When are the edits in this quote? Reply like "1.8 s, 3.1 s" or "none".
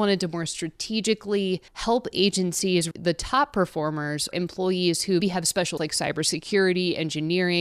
1.7 s, 2.9 s, 4.3 s, 5.2 s, 5.8 s